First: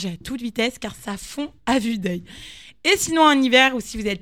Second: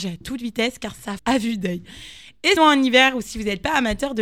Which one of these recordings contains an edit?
second; 2 cuts; at 1.2 s, 2.6 s

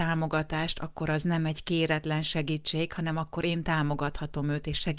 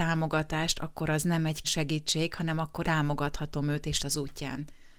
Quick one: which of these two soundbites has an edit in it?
second; 3 cuts; at 1.6 s, 2.8 s, 4.0 s

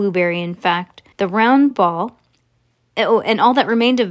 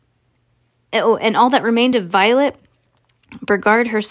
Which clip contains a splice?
first; 3 cuts; at 1.1 s, 1.7 s, 2.4 s

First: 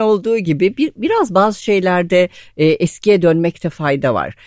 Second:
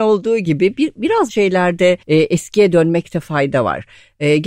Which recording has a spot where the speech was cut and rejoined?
second; 2 cuts; at 1.3 s, 2.0 s

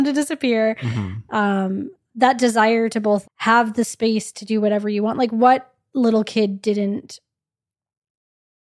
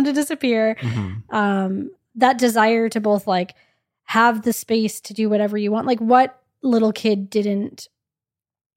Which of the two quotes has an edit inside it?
first; 1 cut; at 3.2 s

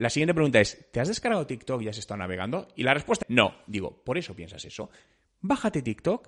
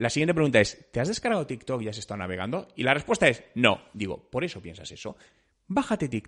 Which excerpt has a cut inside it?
first; 1 cut; at 3.2 s

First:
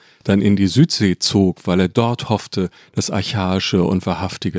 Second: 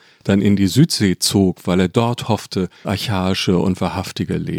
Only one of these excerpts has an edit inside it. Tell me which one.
second; 1 cut; at 2.8 s

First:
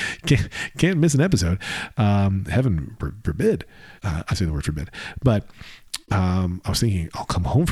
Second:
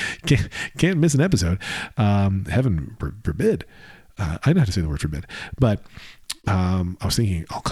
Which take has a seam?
first; 2 cuts; at 4.0 s, 4.3 s

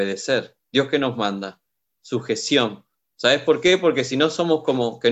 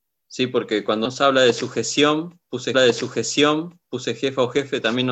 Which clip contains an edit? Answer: second; 2 cuts; at 1.1 s, 2.7 s

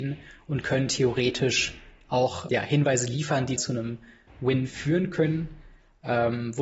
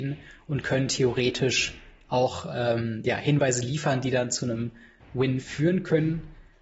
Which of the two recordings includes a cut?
first; 2 cuts; at 2.5 s, 3.6 s

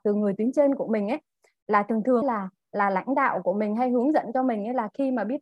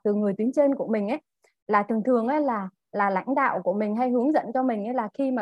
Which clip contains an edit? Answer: first; 1 cut; at 2.2 s

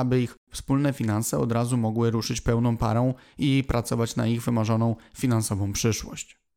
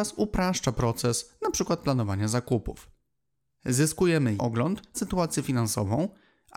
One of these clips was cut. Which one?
second; 2 cuts; at 4.4 s, 4.9 s

